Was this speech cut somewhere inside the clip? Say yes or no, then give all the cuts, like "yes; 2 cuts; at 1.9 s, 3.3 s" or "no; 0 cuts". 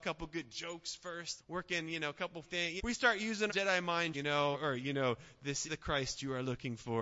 yes; 7 cuts; at 1.4 s, 2.4 s, 2.8 s, 3.5 s, 4.1 s, 4.5 s, 5.7 s